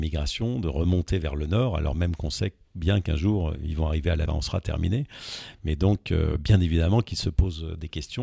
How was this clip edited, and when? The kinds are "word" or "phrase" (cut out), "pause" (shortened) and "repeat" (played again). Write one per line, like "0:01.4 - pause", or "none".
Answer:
0:04.3 - phrase